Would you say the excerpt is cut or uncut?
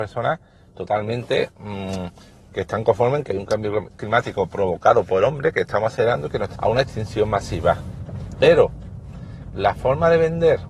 cut